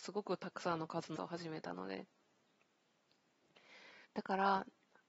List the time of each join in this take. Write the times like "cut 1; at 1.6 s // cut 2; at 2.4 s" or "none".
cut 1; at 1.2 s // cut 2; at 4.1 s